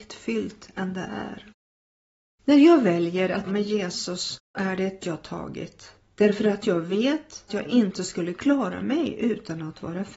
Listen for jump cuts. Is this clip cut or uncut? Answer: cut